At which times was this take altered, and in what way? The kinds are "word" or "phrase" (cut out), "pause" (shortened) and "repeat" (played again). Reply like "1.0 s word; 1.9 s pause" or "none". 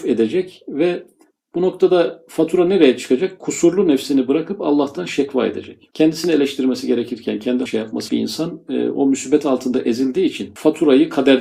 7.7 s word; 8.1 s phrase